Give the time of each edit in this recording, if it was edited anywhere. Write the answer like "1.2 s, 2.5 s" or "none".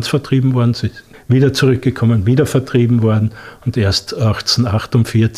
none